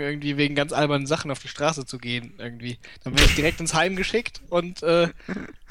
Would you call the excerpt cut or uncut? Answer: uncut